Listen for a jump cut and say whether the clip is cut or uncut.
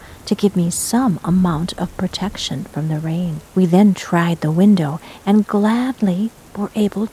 cut